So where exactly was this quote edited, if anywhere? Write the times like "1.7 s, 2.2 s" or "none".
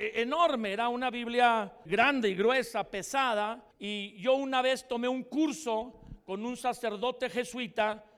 1.9 s, 3.7 s